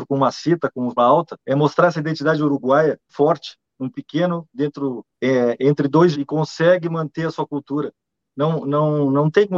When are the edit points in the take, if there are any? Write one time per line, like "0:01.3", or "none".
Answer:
0:01.0
0:01.4
0:03.1
0:03.9
0:05.1
0:06.1